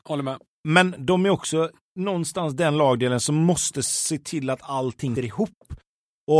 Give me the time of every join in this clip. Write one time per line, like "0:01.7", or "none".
0:05.2